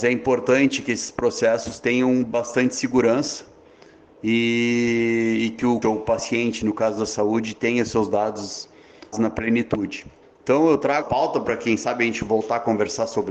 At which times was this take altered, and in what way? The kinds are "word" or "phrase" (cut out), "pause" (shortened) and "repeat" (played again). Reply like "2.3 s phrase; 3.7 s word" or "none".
5.8 s word; 9.1 s word; 10.2 s pause; 11.0 s word